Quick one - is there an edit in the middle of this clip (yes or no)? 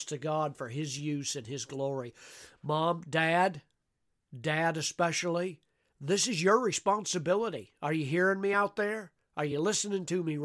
no